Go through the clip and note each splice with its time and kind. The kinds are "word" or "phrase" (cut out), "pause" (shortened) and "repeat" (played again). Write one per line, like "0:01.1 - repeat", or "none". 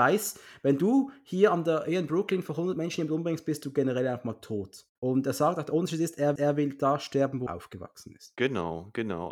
0:05.0 - pause
0:06.4 - repeat
0:07.5 - word